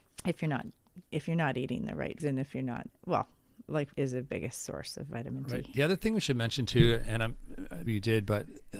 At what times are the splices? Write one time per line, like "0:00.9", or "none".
0:01.1
0:02.2
0:02.9
0:03.9
0:07.9